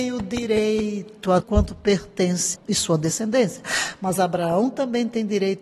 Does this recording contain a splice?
yes; 2 cuts; at 1.4 s, 2.5 s

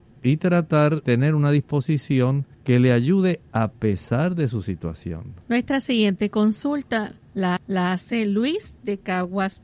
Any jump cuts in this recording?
yes; 4 cuts; at 1.0 s, 2.5 s, 5.4 s, 7.6 s

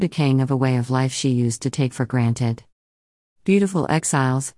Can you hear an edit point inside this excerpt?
no; 0 cuts

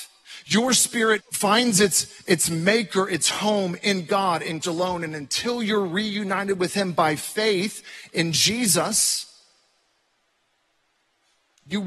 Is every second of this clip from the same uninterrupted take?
no; 2 cuts; at 1.2 s, 4.6 s

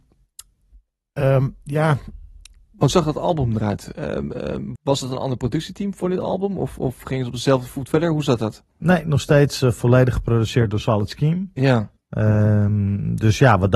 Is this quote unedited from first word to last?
no; 3 cuts; at 2.9 s, 4.8 s, 12.0 s

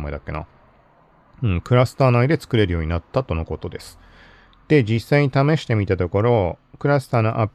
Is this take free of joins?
yes; 0 cuts

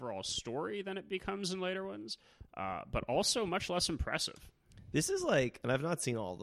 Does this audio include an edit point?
no; 0 cuts

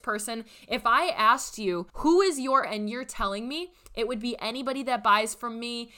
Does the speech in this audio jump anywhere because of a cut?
yes; 2 cuts; at 1.9 s, 2.6 s

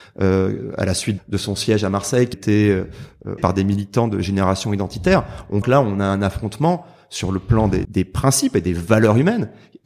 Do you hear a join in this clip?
yes; 5 cuts; at 1.2 s, 2.3 s, 3.4 s, 5.6 s, 7.8 s

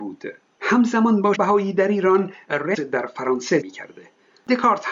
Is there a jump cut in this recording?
yes; 3 cuts; at 1.3 s, 2.7 s, 3.6 s

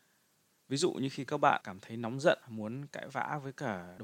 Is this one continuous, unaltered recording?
yes; 0 cuts

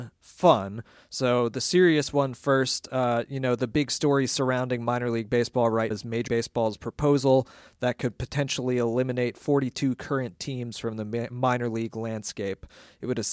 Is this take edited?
yes; 2 cuts; at 5.9 s, 6.3 s

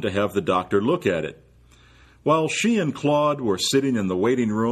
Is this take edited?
no; 0 cuts

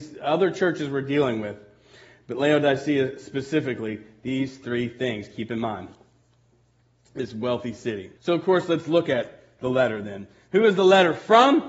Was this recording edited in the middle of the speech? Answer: yes; 1 cut; at 8.2 s

